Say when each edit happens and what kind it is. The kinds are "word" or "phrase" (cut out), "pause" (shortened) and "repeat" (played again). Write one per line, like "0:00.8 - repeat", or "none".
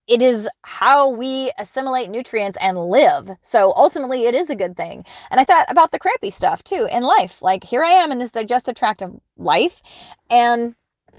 0:05.5 - word